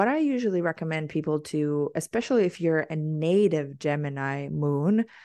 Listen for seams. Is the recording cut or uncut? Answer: uncut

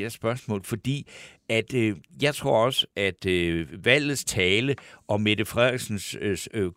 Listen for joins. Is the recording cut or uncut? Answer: uncut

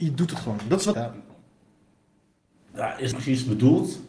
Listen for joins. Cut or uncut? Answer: cut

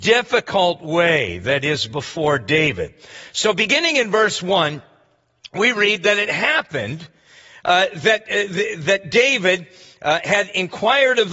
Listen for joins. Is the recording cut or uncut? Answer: uncut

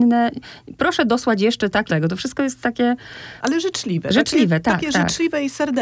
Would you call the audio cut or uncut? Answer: cut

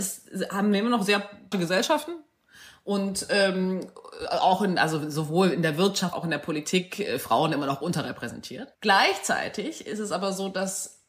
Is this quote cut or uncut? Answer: cut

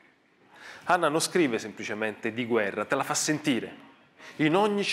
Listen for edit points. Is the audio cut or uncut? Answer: uncut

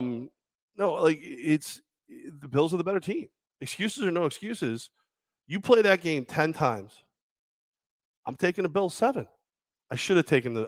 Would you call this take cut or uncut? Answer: uncut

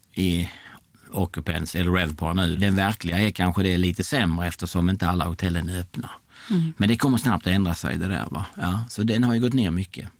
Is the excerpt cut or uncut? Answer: cut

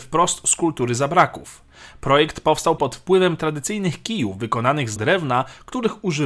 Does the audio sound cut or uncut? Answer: cut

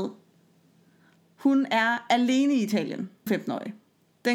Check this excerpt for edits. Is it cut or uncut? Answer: cut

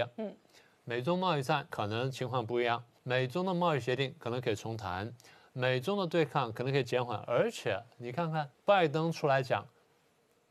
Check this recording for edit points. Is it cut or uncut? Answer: cut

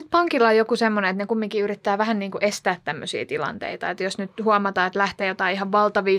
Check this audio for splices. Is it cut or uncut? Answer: uncut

